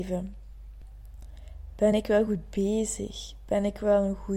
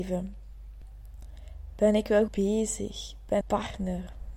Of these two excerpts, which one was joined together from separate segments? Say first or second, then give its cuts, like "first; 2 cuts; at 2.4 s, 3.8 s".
second; 2 cuts; at 2.3 s, 3.4 s